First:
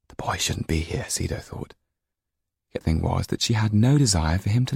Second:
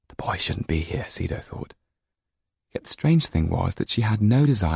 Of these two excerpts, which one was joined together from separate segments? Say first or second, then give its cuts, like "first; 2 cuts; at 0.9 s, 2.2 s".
first; 1 cut; at 2.8 s